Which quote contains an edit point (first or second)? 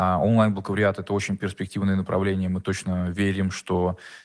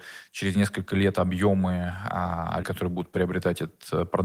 second